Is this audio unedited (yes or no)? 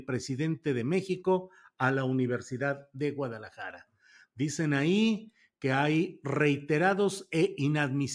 yes